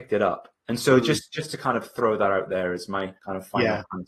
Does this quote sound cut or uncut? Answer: cut